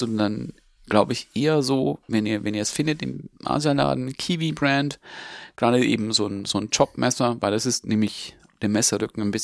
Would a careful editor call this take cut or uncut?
uncut